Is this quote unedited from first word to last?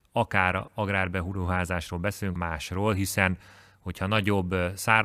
no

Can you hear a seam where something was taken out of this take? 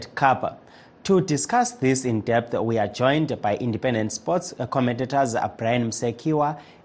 no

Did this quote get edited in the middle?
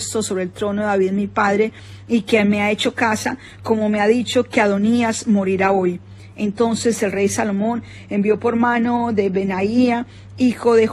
no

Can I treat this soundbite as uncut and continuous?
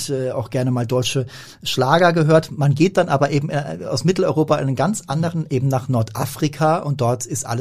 yes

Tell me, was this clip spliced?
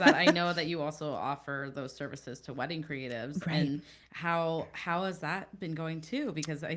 no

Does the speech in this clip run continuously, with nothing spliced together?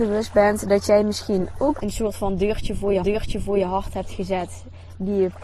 no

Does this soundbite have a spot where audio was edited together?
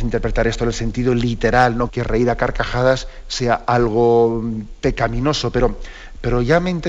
yes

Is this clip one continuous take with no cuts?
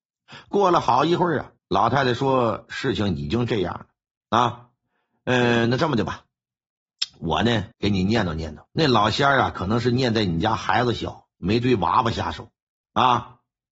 no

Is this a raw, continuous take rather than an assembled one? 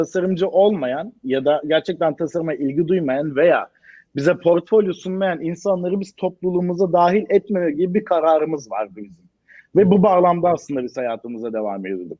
yes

